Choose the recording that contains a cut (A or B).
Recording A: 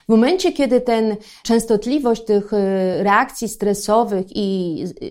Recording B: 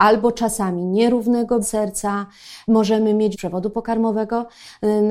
B